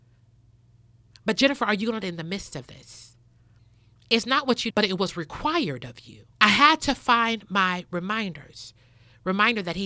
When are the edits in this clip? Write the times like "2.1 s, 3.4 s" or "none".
2.0 s, 4.7 s, 6.3 s